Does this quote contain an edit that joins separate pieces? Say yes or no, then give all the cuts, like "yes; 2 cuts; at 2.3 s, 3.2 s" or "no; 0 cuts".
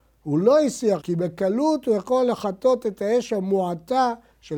yes; 1 cut; at 1.0 s